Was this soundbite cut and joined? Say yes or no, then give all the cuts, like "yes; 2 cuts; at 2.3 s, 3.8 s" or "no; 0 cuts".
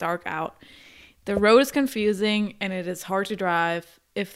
no; 0 cuts